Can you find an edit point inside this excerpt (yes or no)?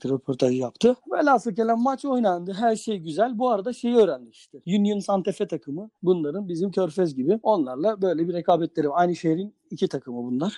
yes